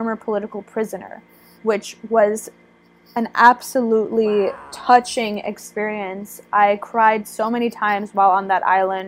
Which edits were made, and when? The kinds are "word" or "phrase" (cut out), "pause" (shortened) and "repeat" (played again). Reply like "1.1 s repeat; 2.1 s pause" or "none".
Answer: none

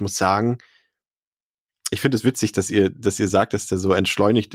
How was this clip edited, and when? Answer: none

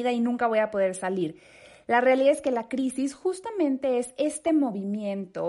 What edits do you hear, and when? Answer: none

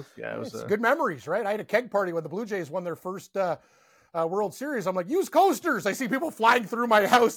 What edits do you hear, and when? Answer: none

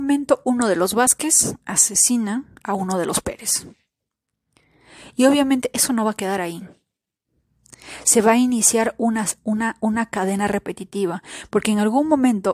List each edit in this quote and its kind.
none

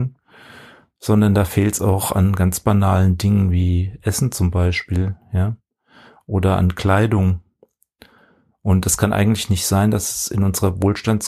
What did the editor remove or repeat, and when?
none

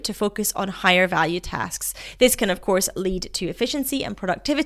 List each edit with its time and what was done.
none

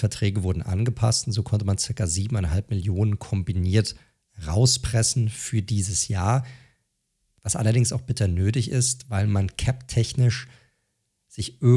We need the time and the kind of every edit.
none

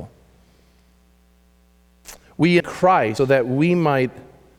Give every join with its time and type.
2.6 s word; 3.2 s word

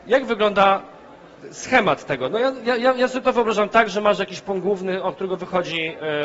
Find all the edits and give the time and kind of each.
none

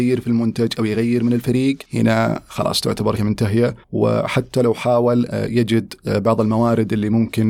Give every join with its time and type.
1.9 s pause; 3.2 s word; 3.8 s pause; 5.3 s word

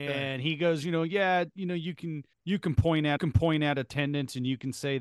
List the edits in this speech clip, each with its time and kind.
2.3 s pause; 3.2 s repeat

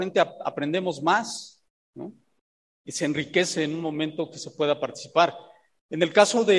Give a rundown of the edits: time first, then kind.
none

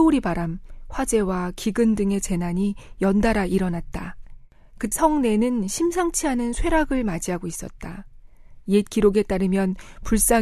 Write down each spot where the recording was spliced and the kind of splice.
4.9 s word

